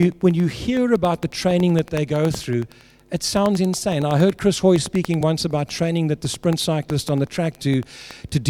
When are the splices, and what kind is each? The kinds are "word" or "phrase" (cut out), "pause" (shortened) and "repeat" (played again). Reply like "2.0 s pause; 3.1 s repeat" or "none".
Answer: none

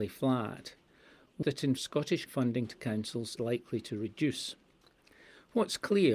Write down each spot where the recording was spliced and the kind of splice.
1.4 s word; 1.8 s word; 2.3 s word; 3.4 s word

